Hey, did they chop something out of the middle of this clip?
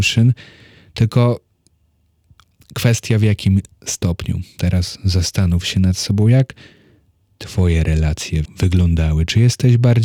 yes; 2 cuts; at 4.5 s, 8.4 s

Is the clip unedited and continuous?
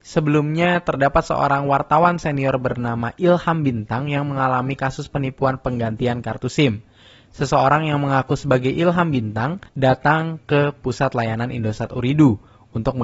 no; 1 cut; at 9.7 s

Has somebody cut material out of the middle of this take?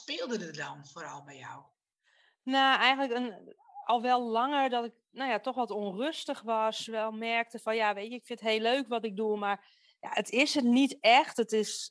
no; 0 cuts

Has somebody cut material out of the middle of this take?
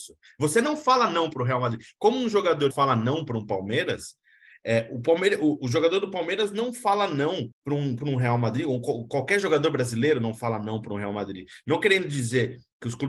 yes; 2 cuts; at 2.7 s, 7.5 s

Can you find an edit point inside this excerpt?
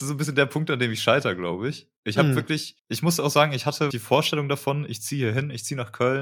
yes; 3 cuts; at 2.0 s, 2.8 s, 3.9 s

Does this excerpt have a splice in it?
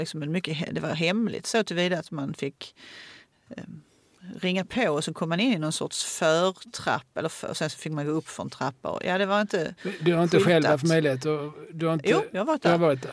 no; 0 cuts

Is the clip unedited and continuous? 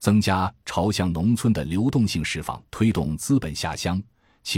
no; 1 cut; at 2.7 s

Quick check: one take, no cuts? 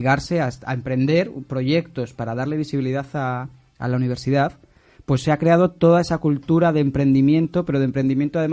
yes; 0 cuts

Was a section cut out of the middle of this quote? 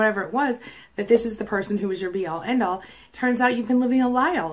no; 0 cuts

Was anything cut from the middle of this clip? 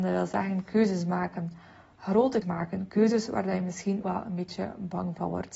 yes; 2 cuts; at 2.4 s, 4.0 s

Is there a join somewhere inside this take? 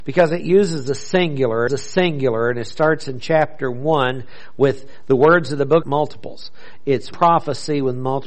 yes; 3 cuts; at 1.7 s, 5.8 s, 7.1 s

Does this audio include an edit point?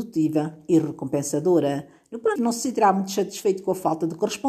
yes; 1 cut; at 2.4 s

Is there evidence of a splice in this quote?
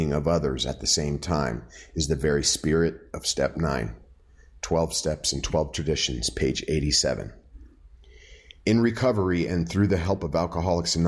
no; 0 cuts

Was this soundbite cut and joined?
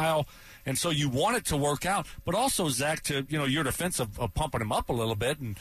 no; 0 cuts

